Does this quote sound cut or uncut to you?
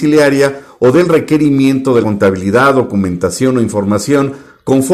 cut